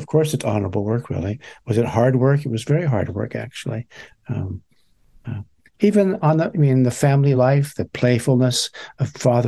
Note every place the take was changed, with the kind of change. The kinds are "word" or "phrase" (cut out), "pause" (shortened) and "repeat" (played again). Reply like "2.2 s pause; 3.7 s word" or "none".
none

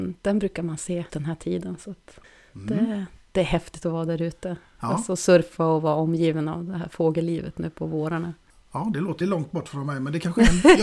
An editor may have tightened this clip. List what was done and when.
1.1 s word; 9.2 s word

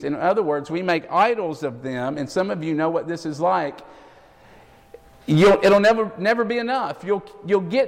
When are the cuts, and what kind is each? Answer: none

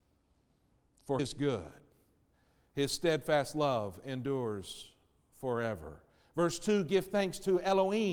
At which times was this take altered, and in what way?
1.2 s word

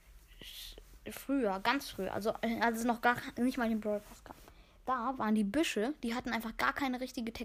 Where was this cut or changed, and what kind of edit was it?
none

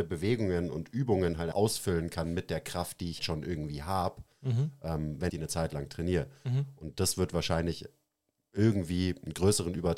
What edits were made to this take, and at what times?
1.5 s word; 3.2 s word; 5.3 s word

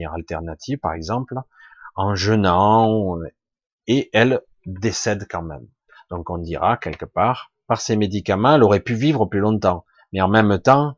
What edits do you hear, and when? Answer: none

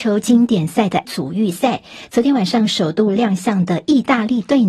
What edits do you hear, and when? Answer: 1.0 s word

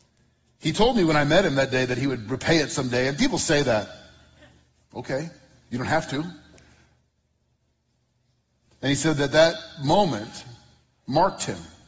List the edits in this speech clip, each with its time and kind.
none

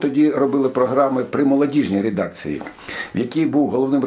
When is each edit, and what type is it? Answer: none

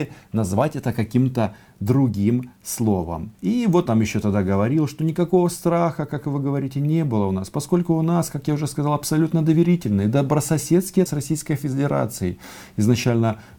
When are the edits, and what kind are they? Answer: 3.3 s pause; 3.9 s word; 11.1 s word

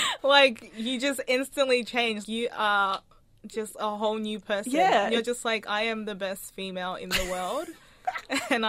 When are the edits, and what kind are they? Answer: 2.2 s word

